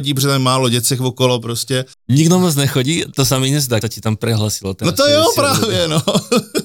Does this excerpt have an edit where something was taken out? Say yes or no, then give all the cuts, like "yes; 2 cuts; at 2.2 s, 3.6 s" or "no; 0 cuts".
yes; 3 cuts; at 1.9 s, 3.1 s, 3.8 s